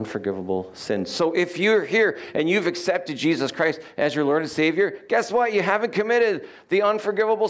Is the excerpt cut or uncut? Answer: uncut